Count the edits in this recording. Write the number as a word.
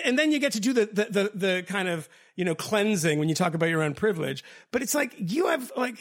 zero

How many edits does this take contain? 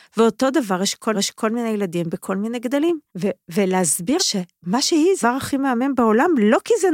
four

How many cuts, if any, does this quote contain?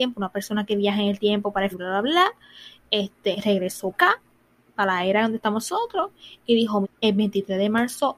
three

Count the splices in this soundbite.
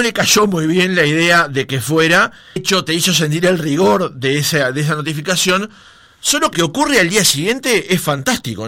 two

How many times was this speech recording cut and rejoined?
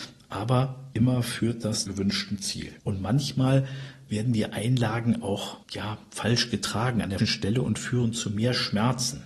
five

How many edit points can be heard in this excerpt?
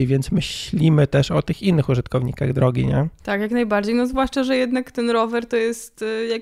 zero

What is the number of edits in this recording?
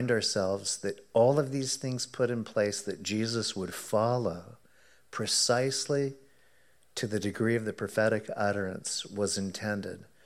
zero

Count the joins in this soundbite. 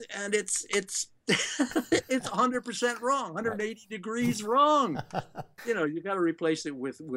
one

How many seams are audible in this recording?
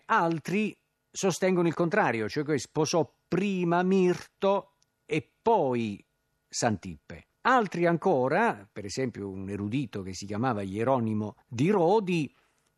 two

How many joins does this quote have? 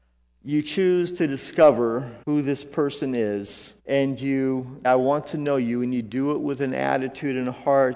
three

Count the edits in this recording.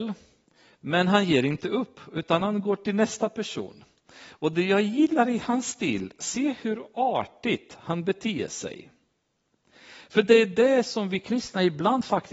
zero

